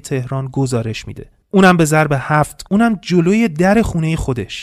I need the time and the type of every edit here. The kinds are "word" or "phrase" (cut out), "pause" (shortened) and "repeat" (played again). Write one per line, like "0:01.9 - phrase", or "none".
0:02.7 - word

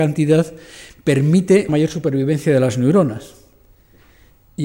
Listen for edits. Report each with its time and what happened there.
0:01.7 - word

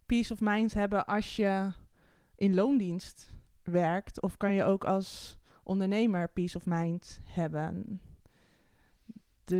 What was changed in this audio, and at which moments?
none

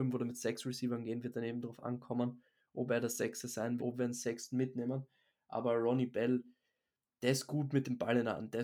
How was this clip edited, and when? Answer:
0:03.8 - word

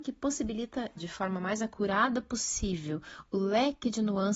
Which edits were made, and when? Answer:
0:01.0 - word

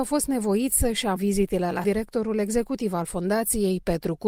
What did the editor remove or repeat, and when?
0:01.2 - word
0:01.8 - phrase

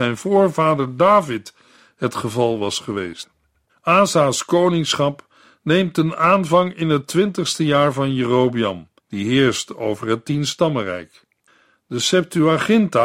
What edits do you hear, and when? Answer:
0:03.7 - pause
0:09.0 - pause

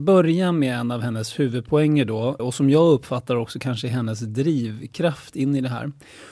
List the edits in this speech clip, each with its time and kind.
0:02.4 - word

